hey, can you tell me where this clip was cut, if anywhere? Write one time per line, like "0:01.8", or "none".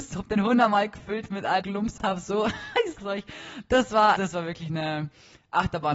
0:01.6
0:02.0
0:03.0
0:04.2